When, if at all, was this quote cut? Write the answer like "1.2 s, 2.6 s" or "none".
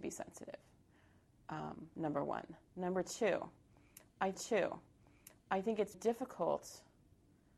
2.6 s, 4.3 s, 5.9 s